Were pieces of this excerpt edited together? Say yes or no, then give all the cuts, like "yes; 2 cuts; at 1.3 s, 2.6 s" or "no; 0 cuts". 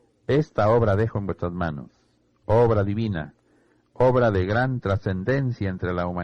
no; 0 cuts